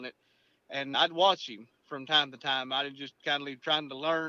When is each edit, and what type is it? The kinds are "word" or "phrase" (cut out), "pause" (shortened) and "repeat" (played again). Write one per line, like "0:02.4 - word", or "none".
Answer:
0:00.9 - word